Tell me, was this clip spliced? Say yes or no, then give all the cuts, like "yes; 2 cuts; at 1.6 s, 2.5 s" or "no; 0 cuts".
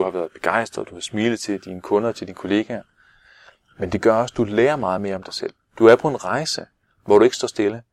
no; 0 cuts